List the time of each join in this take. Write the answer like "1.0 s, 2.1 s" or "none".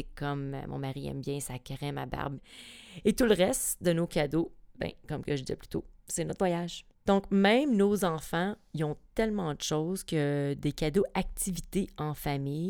6.9 s